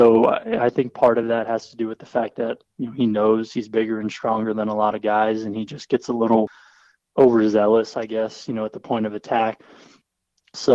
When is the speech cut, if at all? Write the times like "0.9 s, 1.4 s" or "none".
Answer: none